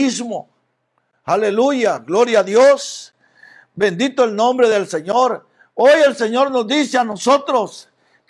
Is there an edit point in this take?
no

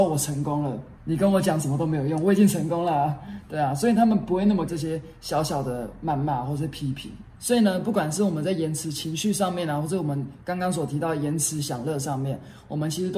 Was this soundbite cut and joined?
yes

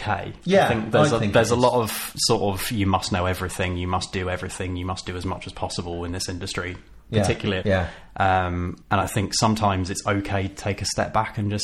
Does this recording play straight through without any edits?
no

